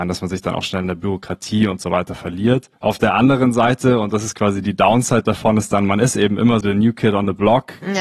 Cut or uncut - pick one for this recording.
cut